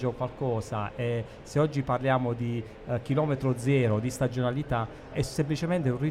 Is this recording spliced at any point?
yes; 1 cut; at 5.1 s

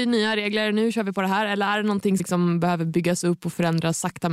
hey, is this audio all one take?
no; 1 cut; at 2.2 s

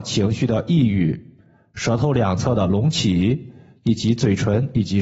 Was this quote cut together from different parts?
no; 0 cuts

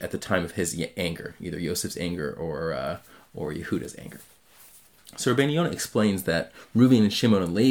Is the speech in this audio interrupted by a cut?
no; 0 cuts

